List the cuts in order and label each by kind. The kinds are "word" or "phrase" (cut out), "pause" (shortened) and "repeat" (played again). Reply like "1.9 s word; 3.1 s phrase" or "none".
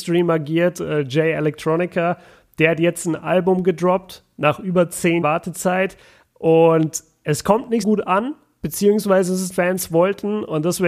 5.2 s word; 7.8 s word; 9.5 s phrase